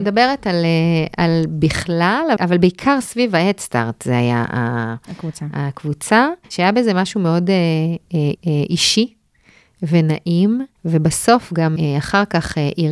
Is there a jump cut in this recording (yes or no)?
yes